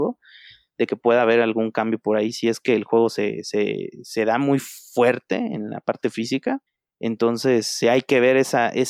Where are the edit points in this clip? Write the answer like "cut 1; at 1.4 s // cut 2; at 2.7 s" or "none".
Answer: cut 1; at 6.7 s